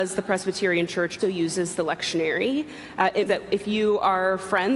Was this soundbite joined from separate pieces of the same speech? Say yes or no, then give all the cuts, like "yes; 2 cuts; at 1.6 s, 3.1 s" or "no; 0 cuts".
yes; 2 cuts; at 1.2 s, 3.3 s